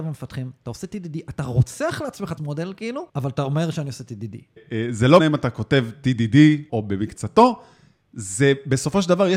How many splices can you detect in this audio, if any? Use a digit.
4